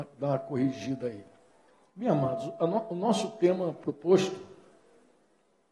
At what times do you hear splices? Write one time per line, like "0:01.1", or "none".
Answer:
none